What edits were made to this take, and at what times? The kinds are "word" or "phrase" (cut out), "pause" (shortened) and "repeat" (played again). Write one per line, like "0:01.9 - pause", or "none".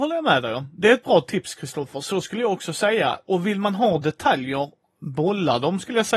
none